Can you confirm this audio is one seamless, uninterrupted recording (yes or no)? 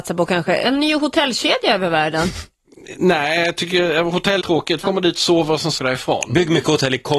no